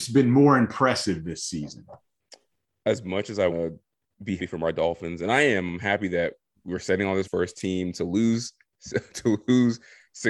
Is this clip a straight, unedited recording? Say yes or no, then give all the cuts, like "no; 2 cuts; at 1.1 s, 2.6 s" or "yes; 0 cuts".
no; 3 cuts; at 3.5 s, 4.4 s, 7.2 s